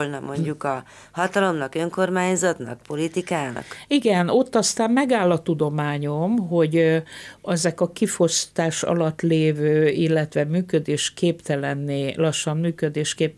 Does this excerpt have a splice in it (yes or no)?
no